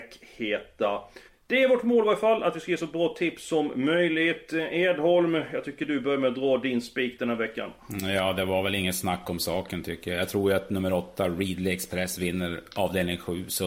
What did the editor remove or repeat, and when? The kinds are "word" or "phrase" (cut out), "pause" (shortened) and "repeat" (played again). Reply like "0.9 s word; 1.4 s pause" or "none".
1.3 s pause